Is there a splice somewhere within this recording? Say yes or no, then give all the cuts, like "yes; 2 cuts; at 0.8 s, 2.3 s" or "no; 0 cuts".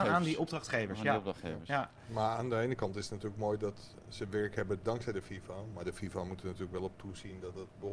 no; 0 cuts